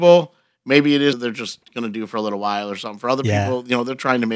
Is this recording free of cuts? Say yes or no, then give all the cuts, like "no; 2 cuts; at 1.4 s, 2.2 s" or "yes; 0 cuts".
no; 1 cut; at 1.1 s